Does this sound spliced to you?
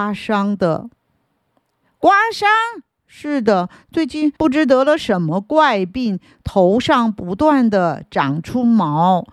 yes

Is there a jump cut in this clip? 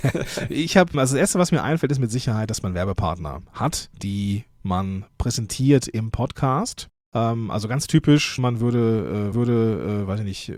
yes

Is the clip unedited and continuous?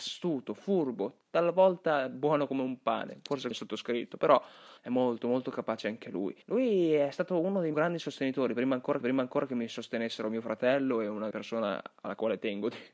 no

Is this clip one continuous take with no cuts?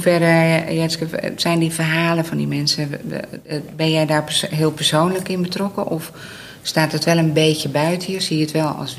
yes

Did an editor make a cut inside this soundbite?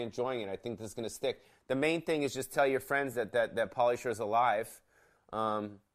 no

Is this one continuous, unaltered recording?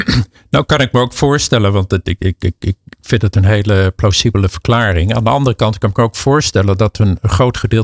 yes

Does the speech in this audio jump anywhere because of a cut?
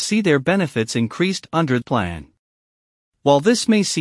yes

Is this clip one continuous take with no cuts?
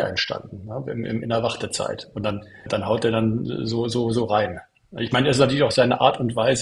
yes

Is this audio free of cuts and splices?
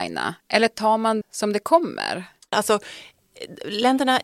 no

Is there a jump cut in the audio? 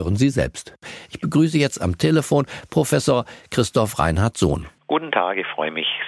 no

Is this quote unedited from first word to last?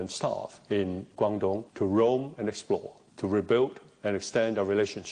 no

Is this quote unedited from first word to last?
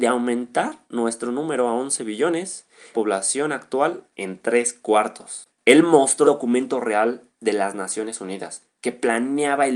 no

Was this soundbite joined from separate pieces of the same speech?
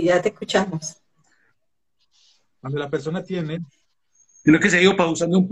no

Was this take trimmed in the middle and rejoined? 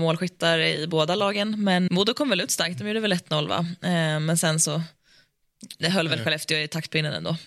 yes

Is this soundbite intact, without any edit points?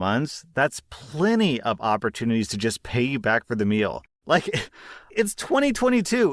no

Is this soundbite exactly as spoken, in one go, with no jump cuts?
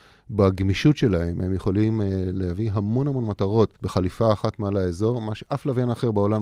no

